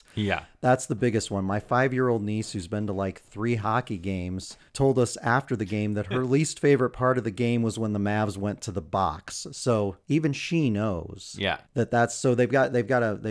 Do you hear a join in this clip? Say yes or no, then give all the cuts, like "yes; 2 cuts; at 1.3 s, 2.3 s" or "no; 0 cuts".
yes; 3 cuts; at 4.7 s, 10.0 s, 11.6 s